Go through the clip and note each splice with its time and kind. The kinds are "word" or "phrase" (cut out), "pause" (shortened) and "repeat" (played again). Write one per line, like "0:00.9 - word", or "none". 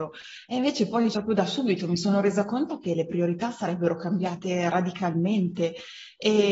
0:01.1 - word